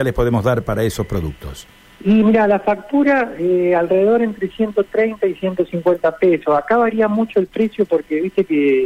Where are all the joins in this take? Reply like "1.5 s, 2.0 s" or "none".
none